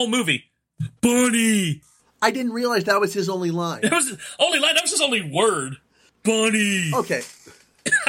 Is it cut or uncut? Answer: uncut